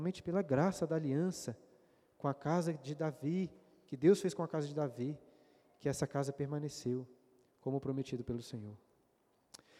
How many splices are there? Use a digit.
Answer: 0